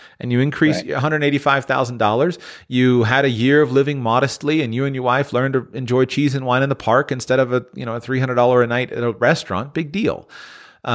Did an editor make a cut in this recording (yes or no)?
no